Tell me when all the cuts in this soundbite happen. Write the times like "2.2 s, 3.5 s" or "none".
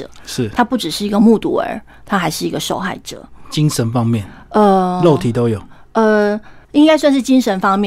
6.6 s